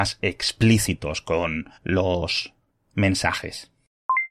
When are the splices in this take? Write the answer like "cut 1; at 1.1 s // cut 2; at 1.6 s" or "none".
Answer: cut 1; at 1.8 s

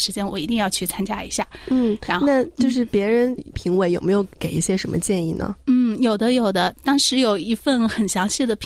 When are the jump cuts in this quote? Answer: cut 1; at 3.4 s

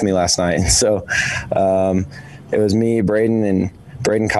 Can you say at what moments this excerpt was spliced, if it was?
none

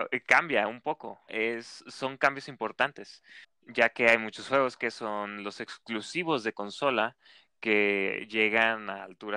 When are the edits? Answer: cut 1; at 1.3 s // cut 2; at 3.4 s

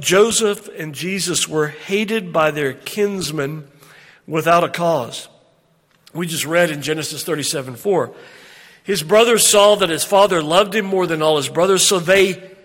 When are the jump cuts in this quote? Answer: none

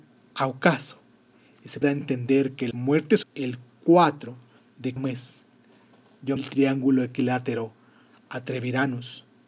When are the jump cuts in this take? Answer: cut 1; at 1.8 s // cut 2; at 2.7 s // cut 3; at 3.2 s // cut 4; at 5.0 s // cut 5; at 6.4 s

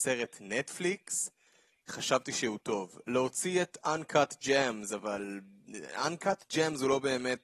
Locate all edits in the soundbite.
cut 1; at 1.9 s

